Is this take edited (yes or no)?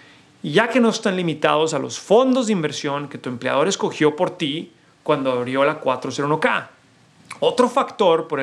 no